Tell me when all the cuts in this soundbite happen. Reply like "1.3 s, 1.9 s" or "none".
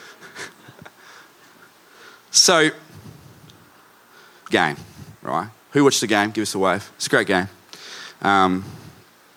4.5 s, 6.9 s